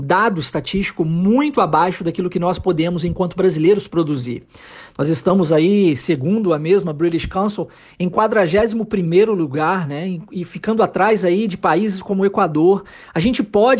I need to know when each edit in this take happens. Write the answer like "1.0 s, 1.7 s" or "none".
none